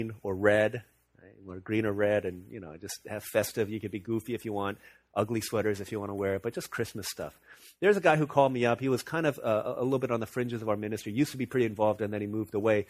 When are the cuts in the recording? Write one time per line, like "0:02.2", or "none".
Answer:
none